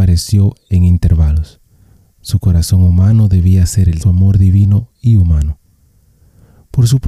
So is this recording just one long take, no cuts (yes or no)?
no